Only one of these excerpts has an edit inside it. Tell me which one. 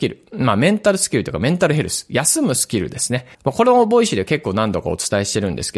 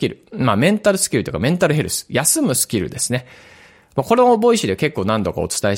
first; 1 cut; at 3.3 s

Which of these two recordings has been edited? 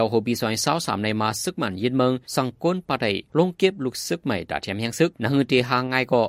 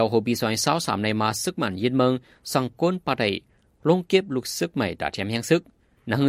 first; 3 cuts; at 2.2 s, 3.3 s, 5.1 s

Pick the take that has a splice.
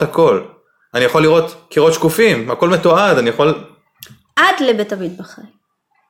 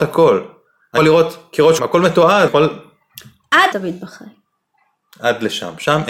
second; 4 cuts; at 1.0 s, 1.8 s, 2.5 s, 3.7 s

